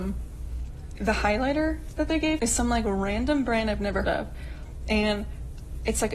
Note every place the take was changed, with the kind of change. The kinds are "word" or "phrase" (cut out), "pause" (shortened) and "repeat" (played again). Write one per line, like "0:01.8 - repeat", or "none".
0:01.0 - word
0:02.4 - word
0:04.0 - word